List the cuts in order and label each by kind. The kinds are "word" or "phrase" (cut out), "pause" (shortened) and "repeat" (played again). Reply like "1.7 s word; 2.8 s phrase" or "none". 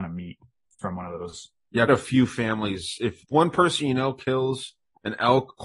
1.9 s word; 3.2 s word

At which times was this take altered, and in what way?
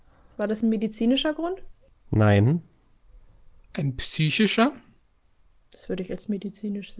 none

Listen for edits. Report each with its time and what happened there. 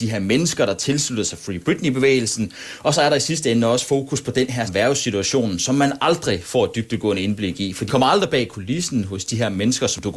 4.7 s word; 7.9 s word

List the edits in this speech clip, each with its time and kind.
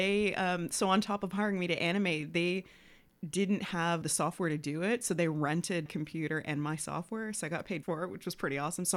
4.0 s word; 5.9 s word; 7.8 s word

